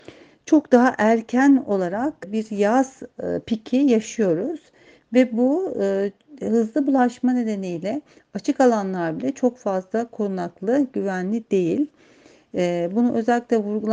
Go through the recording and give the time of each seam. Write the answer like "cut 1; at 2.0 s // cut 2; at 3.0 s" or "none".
none

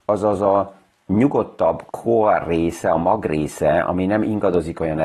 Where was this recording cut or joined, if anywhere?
cut 1; at 1.9 s

